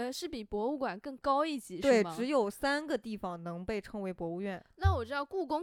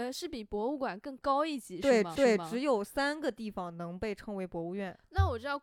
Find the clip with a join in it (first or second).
second